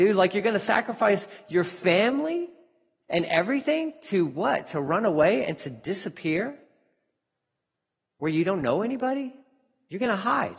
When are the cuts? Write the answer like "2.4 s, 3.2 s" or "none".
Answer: none